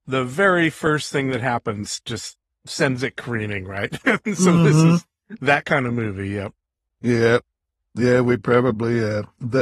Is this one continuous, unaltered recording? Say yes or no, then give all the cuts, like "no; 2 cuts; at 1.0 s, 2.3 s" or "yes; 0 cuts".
yes; 0 cuts